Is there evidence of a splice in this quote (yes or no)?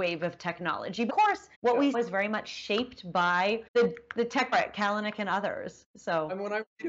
yes